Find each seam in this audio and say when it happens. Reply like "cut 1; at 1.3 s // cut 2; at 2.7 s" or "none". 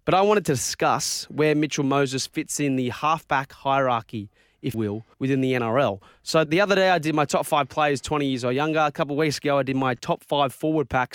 cut 1; at 4.7 s // cut 2; at 5.1 s // cut 3; at 6.5 s